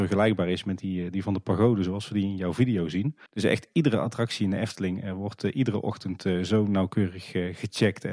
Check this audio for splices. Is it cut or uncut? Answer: cut